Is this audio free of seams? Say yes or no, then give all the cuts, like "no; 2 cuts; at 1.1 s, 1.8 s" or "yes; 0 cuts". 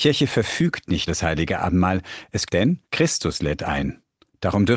no; 3 cuts; at 1.1 s, 2.4 s, 2.8 s